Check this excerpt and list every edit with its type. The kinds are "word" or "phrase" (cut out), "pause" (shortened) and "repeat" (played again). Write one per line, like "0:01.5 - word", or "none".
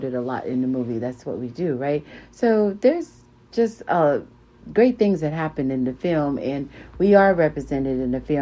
none